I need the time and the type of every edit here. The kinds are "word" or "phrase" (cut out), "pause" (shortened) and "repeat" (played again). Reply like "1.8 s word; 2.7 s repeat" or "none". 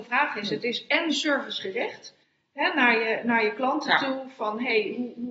2.2 s pause